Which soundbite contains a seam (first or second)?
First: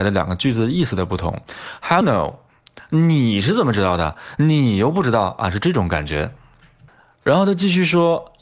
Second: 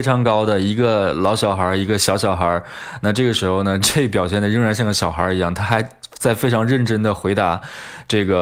first